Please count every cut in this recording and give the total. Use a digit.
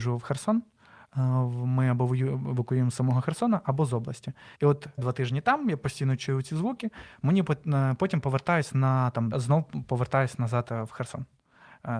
3